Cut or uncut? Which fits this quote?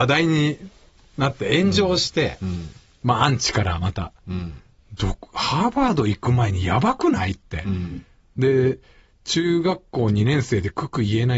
uncut